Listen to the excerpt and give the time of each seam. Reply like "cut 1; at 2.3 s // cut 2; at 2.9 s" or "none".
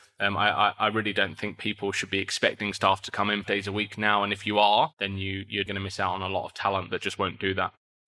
cut 1; at 3.4 s // cut 2; at 5.7 s // cut 3; at 6.9 s